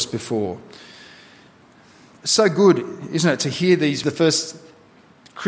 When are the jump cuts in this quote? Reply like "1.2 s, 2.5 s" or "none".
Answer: 4.0 s